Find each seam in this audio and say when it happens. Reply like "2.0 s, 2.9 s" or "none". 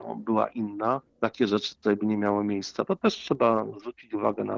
1.1 s